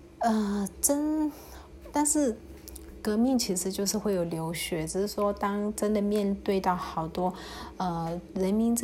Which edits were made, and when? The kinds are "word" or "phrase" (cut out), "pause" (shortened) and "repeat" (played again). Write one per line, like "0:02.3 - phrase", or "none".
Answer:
0:01.9 - word